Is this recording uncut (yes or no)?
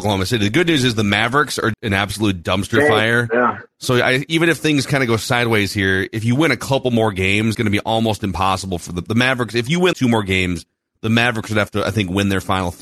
no